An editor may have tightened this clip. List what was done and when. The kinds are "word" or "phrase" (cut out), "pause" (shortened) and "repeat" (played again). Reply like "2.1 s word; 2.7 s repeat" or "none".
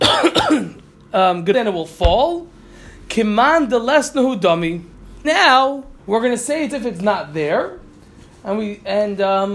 1.5 s phrase; 5.2 s word; 6.0 s pause; 6.7 s word